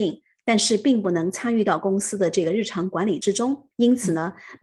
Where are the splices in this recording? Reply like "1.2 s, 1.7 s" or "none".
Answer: 3.7 s